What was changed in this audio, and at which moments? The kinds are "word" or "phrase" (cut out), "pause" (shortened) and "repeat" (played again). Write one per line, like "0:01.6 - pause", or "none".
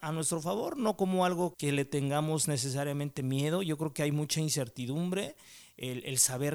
0:01.5 - word